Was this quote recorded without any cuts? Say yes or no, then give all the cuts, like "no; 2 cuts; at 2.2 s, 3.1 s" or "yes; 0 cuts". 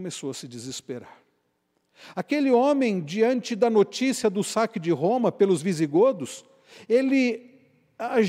yes; 0 cuts